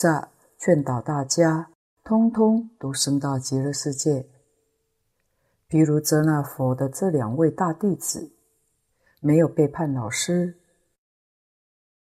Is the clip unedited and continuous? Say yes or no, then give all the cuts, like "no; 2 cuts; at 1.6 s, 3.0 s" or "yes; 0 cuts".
yes; 0 cuts